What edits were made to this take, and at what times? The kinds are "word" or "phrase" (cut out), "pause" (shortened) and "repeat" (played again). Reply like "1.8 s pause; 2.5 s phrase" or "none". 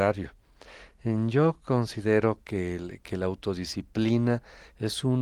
none

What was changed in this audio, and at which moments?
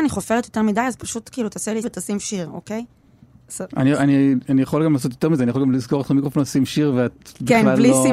1.8 s word

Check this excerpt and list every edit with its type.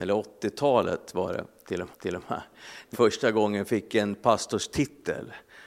1.9 s repeat; 2.9 s word

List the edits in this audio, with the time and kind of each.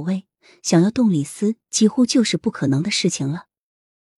none

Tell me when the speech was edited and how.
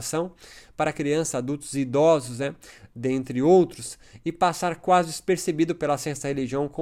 none

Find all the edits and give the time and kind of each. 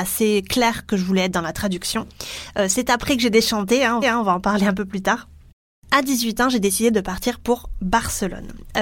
4.0 s repeat

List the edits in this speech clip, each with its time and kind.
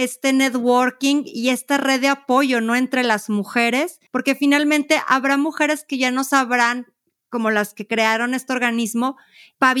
4.1 s pause

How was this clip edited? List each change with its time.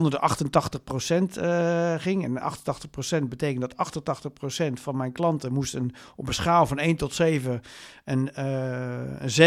none

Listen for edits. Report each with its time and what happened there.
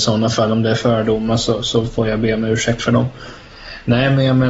none

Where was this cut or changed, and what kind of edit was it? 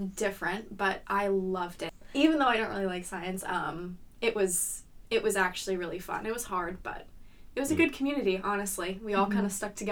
none

